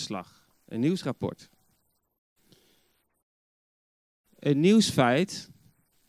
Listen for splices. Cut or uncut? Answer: uncut